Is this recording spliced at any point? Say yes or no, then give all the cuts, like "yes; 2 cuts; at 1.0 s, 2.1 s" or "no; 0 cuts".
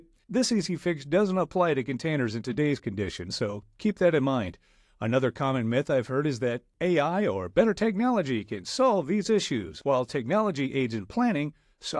no; 0 cuts